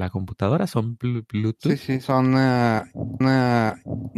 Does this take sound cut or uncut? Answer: cut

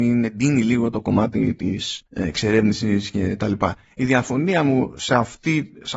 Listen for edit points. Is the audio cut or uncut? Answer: cut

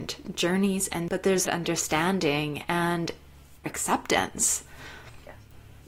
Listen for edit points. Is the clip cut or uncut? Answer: cut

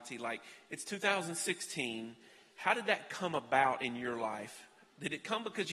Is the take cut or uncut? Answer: uncut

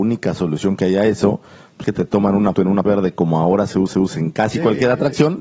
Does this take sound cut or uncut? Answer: cut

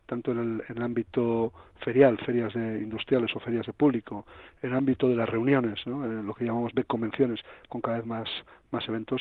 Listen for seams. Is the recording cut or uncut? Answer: uncut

